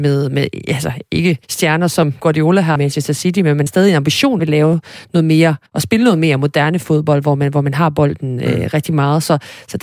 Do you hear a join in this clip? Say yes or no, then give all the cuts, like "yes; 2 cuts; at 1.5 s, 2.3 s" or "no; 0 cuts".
yes; 6 cuts; at 1.4 s, 2.2 s, 2.8 s, 3.7 s, 4.4 s, 5.7 s